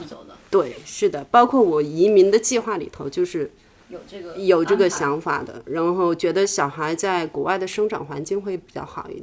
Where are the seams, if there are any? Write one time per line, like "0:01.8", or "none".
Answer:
none